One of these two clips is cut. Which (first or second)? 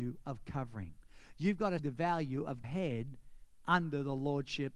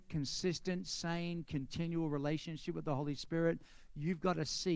first